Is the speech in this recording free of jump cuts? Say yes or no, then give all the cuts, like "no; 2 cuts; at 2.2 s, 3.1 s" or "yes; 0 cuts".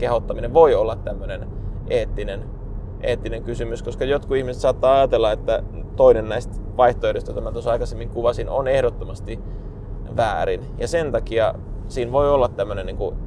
yes; 0 cuts